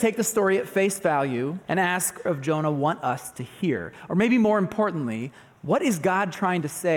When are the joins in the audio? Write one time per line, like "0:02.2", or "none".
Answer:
0:01.6
0:02.3